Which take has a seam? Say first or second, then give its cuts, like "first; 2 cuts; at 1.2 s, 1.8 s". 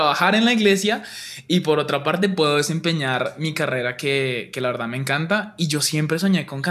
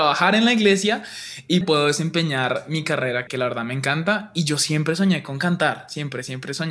second; 2 cuts; at 1.6 s, 3.3 s